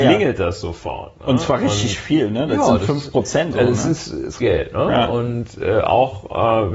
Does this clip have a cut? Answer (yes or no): yes